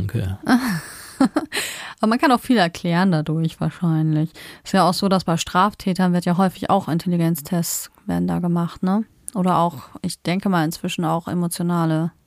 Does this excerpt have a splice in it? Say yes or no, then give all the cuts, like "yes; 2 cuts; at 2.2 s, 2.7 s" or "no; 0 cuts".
no; 0 cuts